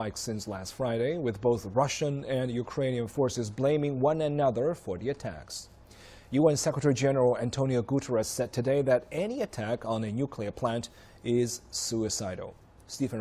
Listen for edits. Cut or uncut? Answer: uncut